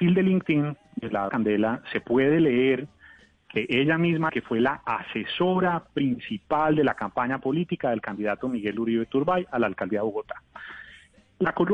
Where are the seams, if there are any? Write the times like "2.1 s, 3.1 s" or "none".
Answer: 1.3 s, 4.3 s